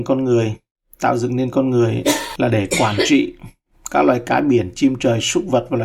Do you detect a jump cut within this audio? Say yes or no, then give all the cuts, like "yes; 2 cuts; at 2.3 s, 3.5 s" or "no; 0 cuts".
no; 0 cuts